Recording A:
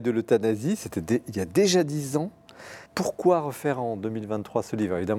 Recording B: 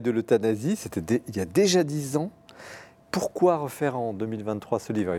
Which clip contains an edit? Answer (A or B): A